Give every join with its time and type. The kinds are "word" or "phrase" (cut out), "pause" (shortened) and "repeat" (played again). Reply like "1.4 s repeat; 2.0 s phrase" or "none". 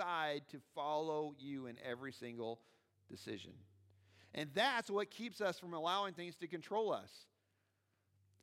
none